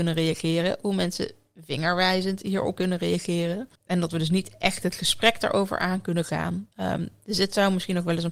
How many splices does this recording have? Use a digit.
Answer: 3